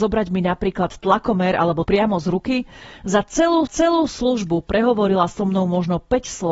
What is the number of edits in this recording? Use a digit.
2